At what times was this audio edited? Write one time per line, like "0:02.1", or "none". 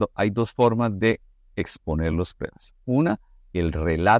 none

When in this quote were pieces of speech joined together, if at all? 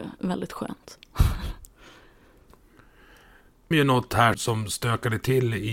0:03.7
0:04.3

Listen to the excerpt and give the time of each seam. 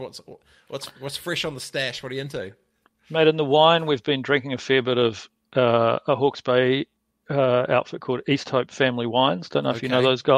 none

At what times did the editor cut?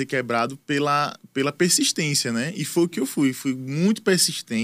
none

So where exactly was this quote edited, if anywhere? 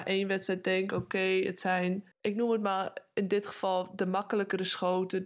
0:02.1

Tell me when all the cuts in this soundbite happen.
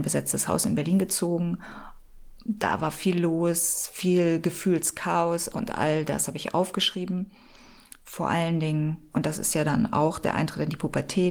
0:05.5

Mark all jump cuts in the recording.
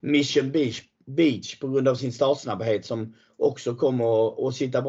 none

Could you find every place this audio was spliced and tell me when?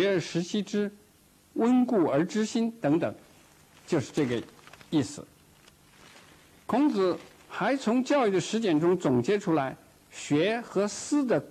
none

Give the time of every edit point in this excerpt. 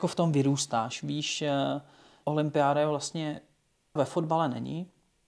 0:02.2
0:04.0

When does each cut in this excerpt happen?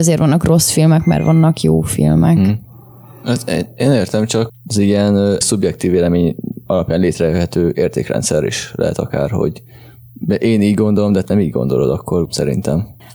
0:05.4
0:11.2
0:12.2

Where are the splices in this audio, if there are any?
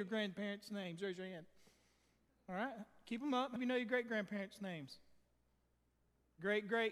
0:03.6

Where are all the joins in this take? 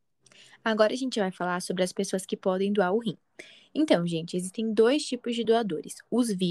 none

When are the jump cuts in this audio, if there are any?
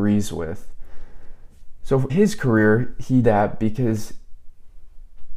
0:02.1
0:03.2

